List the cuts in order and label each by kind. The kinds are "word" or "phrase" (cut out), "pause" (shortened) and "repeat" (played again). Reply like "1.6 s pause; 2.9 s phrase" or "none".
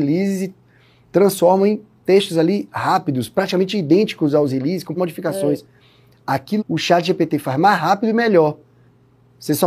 5.0 s word; 6.6 s word